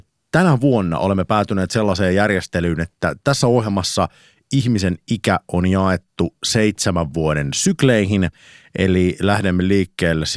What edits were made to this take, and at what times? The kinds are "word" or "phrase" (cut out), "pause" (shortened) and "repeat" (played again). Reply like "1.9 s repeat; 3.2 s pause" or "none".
none